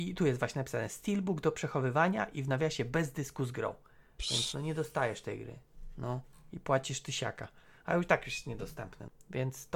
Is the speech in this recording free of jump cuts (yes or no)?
yes